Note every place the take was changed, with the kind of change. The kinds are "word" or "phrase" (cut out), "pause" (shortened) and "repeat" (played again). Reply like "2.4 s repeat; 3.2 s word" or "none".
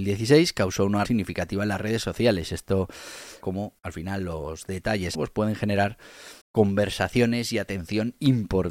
1.0 s word; 3.4 s word; 3.8 s pause; 5.1 s phrase; 6.4 s pause